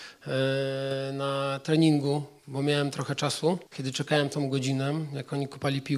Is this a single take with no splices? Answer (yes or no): no